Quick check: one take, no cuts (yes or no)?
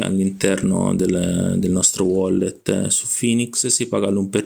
yes